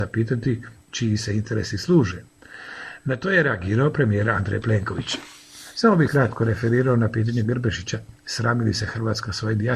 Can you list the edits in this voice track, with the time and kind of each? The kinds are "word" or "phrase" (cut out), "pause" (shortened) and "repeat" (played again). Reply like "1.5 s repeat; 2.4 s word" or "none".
6.1 s word; 7.4 s word